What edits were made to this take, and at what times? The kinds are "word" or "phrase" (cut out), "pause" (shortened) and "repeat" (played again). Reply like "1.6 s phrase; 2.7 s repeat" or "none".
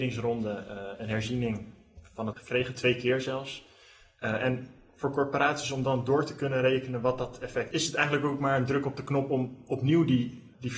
2.3 s word; 7.7 s word

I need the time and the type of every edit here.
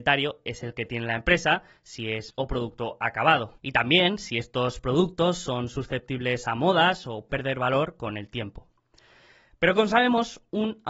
2.3 s phrase; 3.6 s pause; 7.3 s word

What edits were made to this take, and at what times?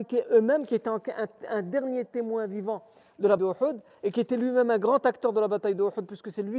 3.4 s word

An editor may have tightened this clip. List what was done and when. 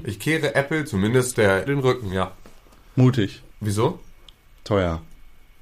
1.3 s word; 1.7 s word; 3.5 s pause

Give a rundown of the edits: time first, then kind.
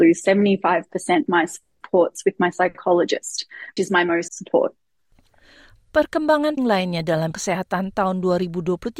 1.3 s word; 3.8 s word; 4.3 s word; 6.6 s word; 7.3 s word

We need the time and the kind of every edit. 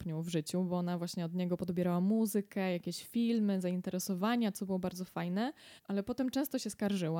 5.8 s pause

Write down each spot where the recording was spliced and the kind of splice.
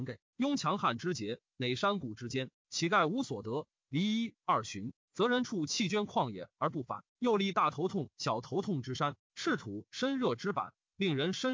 7.1 s pause

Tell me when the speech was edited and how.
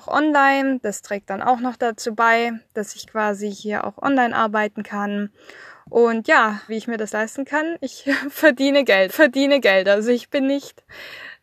6.7 s word; 9.1 s repeat

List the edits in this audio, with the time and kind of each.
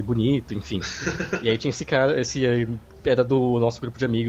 none

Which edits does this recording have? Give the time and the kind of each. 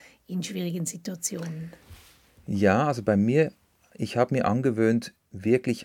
none

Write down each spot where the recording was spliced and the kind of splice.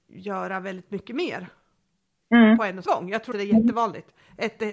2.9 s word; 3.3 s word

